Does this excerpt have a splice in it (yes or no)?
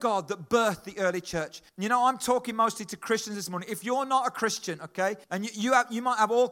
yes